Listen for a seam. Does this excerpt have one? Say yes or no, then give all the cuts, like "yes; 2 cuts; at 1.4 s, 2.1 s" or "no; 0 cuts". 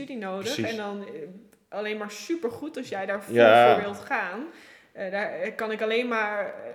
no; 0 cuts